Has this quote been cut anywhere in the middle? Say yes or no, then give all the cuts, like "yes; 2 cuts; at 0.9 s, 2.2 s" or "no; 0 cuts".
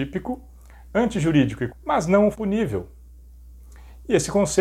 yes; 2 cuts; at 1.7 s, 2.3 s